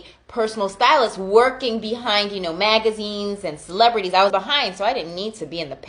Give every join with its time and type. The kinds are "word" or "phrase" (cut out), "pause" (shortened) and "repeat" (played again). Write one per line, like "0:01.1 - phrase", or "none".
0:04.3 - word